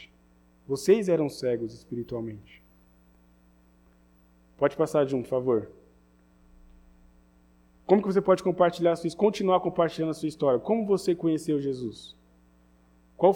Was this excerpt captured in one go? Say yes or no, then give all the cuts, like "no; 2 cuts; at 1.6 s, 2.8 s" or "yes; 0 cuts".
yes; 0 cuts